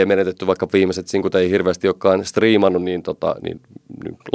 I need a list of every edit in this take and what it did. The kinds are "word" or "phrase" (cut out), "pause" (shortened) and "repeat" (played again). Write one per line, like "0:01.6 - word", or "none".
none